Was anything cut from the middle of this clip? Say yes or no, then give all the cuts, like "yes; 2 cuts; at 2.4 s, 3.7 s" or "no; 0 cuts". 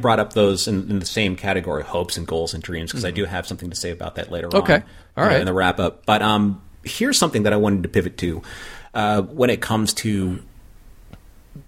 no; 0 cuts